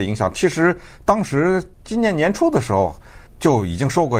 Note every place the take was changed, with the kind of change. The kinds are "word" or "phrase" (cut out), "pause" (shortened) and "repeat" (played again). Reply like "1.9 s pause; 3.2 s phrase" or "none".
1.7 s pause; 3.3 s pause